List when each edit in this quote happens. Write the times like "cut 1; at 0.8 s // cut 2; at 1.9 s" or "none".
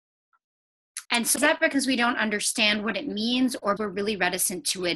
cut 1; at 1.0 s // cut 2; at 1.4 s // cut 3; at 3.8 s